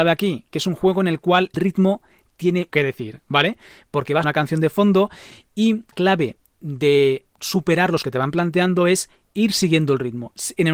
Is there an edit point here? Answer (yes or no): yes